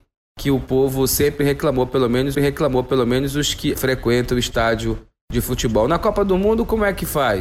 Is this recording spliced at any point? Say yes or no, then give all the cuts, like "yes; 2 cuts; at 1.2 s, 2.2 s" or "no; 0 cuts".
yes; 2 cuts; at 2.3 s, 3.7 s